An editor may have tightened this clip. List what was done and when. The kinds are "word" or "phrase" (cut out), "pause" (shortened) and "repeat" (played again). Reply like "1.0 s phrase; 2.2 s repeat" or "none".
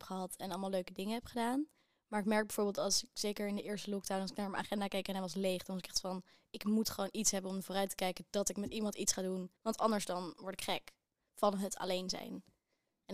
9.6 s pause